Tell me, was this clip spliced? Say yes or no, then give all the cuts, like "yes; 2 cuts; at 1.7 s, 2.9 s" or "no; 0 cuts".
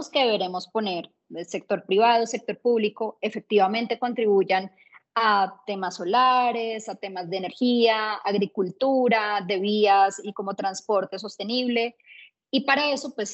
no; 0 cuts